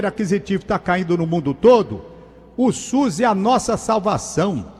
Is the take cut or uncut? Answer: uncut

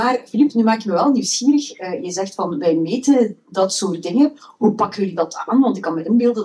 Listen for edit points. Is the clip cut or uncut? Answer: uncut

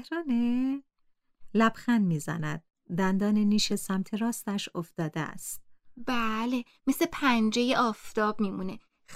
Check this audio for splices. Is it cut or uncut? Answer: uncut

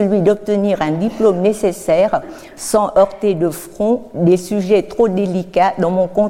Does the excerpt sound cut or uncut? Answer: uncut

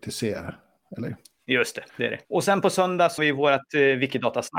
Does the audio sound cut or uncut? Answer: cut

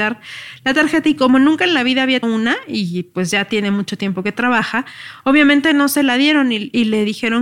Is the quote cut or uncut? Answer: cut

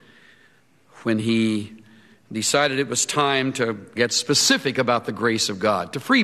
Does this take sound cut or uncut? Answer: uncut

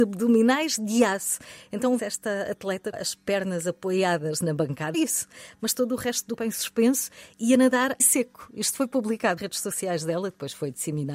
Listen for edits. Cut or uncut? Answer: cut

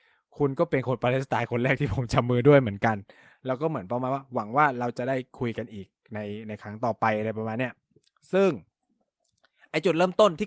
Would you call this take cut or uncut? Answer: uncut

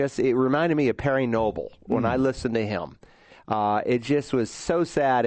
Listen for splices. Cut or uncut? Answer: uncut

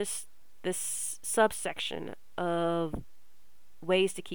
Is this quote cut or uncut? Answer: uncut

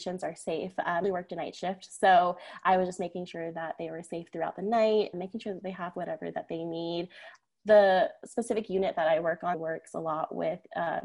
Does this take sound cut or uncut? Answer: cut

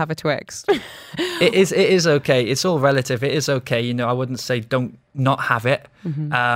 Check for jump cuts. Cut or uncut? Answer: cut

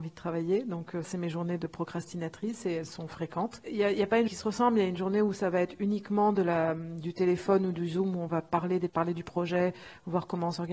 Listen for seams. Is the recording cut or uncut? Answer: cut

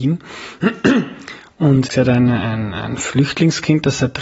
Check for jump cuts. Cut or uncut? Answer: cut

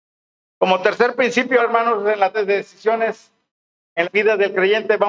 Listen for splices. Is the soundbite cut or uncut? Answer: cut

